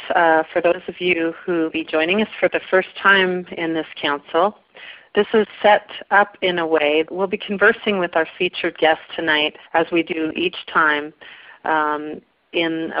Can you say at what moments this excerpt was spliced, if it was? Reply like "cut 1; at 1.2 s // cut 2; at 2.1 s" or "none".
cut 1; at 1.7 s // cut 2; at 7.1 s // cut 3; at 8.3 s // cut 4; at 9.7 s